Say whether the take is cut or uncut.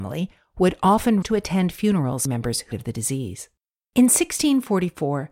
cut